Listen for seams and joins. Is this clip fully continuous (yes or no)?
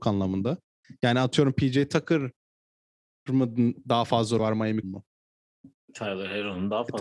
no